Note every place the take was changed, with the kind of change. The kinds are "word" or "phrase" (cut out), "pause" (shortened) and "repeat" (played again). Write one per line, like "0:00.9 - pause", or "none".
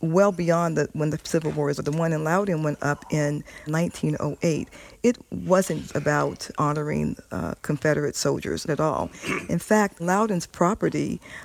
0:01.8 - word
0:03.7 - word
0:05.9 - word
0:06.5 - word
0:08.7 - word
0:10.0 - word